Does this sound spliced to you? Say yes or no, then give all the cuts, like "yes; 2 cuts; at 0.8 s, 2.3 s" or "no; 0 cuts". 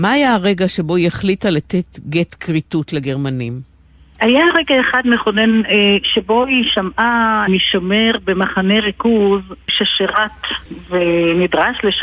no; 0 cuts